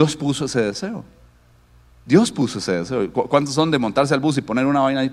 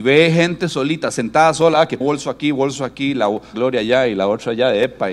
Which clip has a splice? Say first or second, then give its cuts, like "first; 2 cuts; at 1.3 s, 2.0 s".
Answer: second; 2 cuts; at 2.0 s, 3.5 s